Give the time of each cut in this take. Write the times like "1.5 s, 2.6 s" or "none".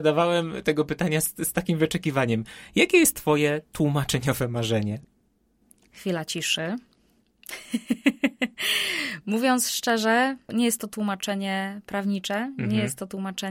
none

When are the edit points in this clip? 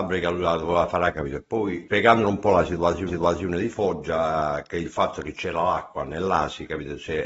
1.1 s, 3.1 s

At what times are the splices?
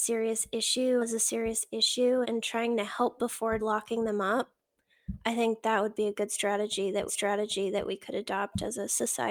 1.0 s, 2.2 s, 3.2 s, 3.6 s, 7.1 s

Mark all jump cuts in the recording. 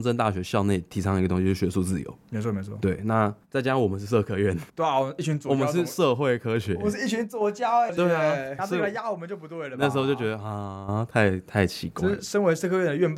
3.4 s, 4.7 s, 7.9 s, 8.6 s

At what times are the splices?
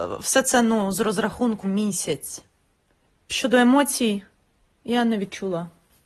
1.6 s, 4.7 s

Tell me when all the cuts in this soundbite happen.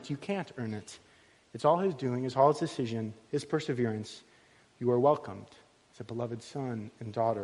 none

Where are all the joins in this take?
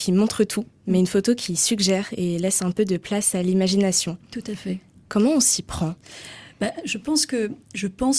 none

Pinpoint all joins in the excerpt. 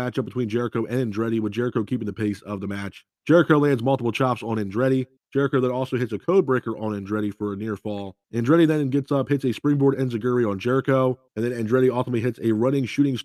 3.1 s, 5.2 s, 8.2 s, 11.3 s

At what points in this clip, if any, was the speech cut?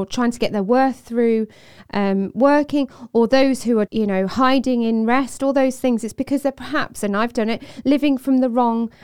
3.9 s

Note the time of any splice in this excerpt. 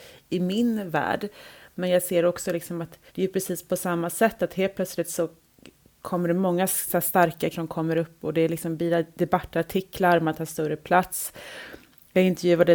3.1 s, 7.5 s

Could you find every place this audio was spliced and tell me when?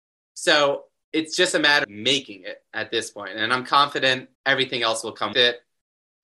1.8 s, 4.3 s, 5.3 s

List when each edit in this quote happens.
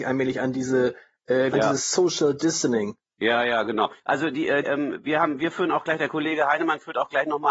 1.5 s, 3.0 s, 4.0 s, 4.6 s

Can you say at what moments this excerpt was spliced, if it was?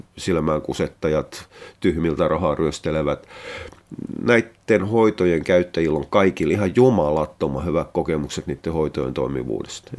none

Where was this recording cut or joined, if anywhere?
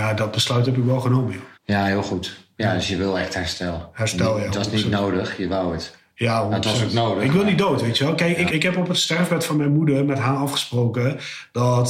1.5 s, 8.5 s

